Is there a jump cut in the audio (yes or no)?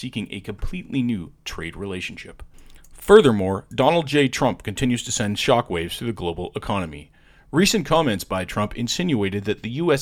no